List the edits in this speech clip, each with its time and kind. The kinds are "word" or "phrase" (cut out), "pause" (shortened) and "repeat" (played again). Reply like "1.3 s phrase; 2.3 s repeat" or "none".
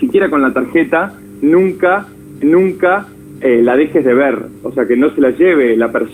2.4 s repeat